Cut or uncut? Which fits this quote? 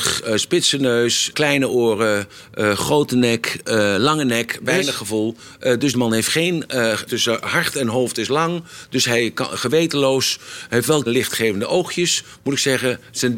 cut